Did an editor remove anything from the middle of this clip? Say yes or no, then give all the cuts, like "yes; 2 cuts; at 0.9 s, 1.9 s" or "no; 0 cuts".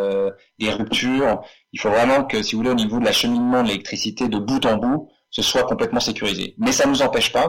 no; 0 cuts